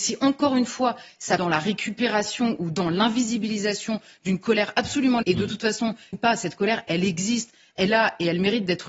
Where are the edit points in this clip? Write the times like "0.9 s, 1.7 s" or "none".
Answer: 1.4 s, 5.2 s, 6.1 s, 7.9 s